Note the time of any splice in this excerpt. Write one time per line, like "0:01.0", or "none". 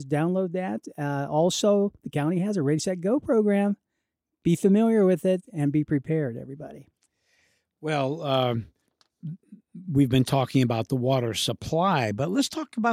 none

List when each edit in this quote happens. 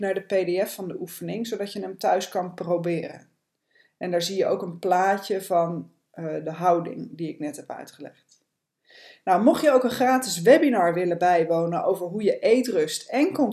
none

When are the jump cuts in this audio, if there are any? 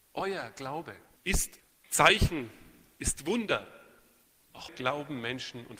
0:04.7

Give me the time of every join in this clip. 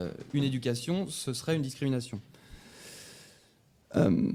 none

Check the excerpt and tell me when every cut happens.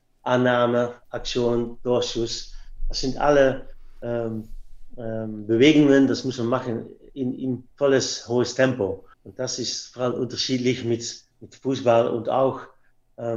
0:01.0
0:07.7
0:09.1
0:11.3

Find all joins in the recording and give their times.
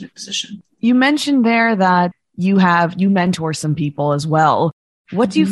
none

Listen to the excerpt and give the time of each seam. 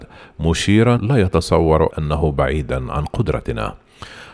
0:01.0
0:01.9

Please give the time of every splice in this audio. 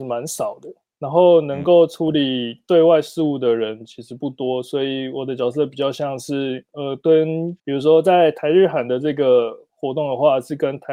0:07.6

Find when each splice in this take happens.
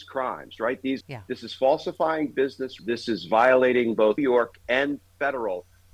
0:01.0
0:02.8
0:04.2

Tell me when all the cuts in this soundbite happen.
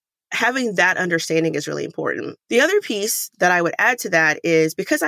0:02.4

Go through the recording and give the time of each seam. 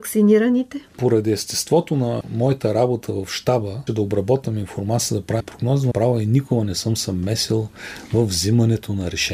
0:03.9
0:05.4
0:05.9

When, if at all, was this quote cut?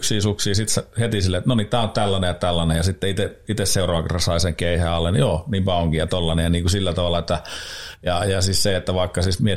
none

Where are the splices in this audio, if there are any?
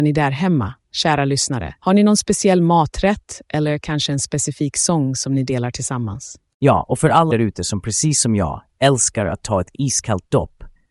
0:01.8
0:07.3

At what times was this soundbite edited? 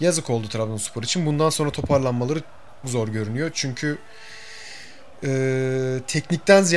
0:02.8

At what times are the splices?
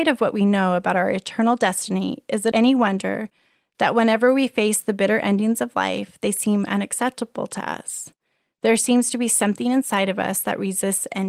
none

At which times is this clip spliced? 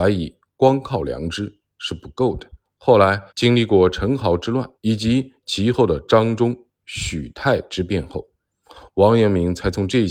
0:02.6
0:03.3
0:04.8

